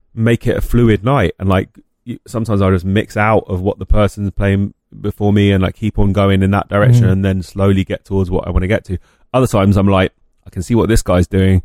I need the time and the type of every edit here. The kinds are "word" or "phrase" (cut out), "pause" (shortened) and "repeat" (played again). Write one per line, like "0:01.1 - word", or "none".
none

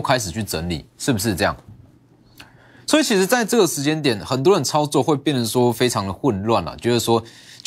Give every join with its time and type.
none

